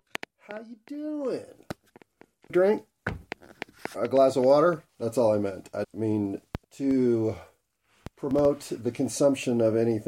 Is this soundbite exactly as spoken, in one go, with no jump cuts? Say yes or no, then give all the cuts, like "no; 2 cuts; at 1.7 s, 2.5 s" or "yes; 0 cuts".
no; 4 cuts; at 2.5 s, 4.9 s, 5.8 s, 6.6 s